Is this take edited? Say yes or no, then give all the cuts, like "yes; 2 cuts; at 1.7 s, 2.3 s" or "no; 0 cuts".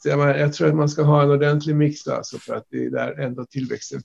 yes; 1 cut; at 2.0 s